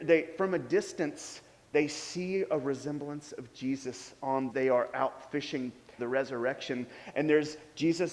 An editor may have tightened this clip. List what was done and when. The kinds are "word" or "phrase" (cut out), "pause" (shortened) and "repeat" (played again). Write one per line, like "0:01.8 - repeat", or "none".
0:04.5 - phrase
0:06.0 - word